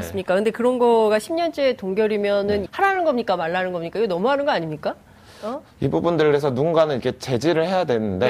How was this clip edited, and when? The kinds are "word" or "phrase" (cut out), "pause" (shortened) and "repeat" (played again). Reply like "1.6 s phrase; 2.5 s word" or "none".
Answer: 2.7 s word; 5.7 s pause